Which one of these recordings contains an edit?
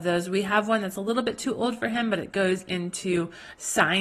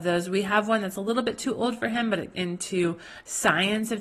second; 1 cut; at 2.3 s

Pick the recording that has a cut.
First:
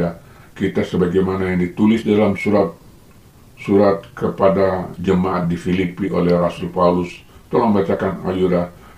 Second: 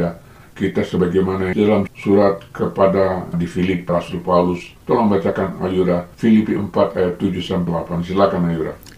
second; 7 cuts; at 1.5 s, 1.9 s, 3.3 s, 3.9 s, 4.8 s, 6.1 s, 7.7 s

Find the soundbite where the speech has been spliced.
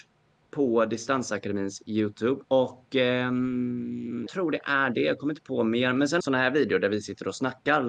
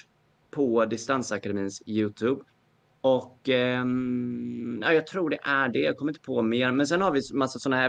first; 3 cuts; at 2.4 s, 4.3 s, 6.2 s

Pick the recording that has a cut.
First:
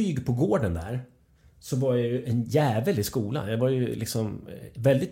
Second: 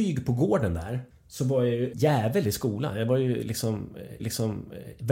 second; 3 cuts; at 1.1 s, 1.9 s, 4.2 s

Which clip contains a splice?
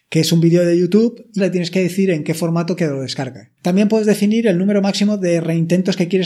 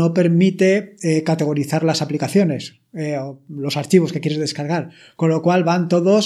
first; 3 cuts; at 1.4 s, 2.8 s, 3.6 s

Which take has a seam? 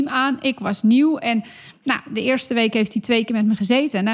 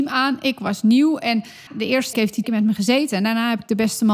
second; 3 cuts; at 1.7 s, 2.1 s, 2.4 s

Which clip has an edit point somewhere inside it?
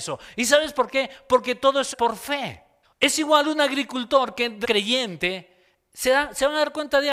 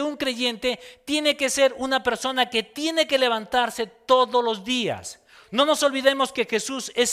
first; 3 cuts; at 1.9 s, 2.8 s, 4.6 s

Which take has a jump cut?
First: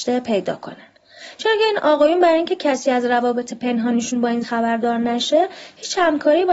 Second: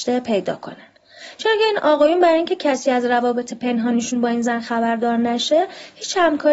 first; 1 cut; at 4.4 s

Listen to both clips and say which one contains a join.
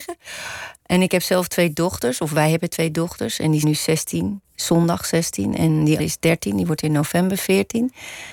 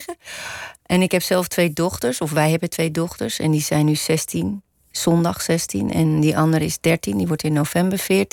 first; 3 cuts; at 3.6 s, 4.4 s, 6.0 s

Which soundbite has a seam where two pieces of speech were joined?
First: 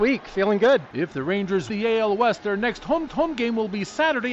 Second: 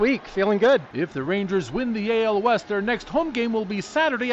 first; 2 cuts; at 1.7 s, 3.1 s

